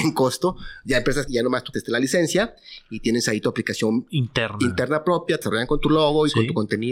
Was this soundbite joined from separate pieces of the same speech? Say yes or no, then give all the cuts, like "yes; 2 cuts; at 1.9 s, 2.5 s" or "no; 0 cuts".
yes; 3 cuts; at 1.3 s, 1.7 s, 5.4 s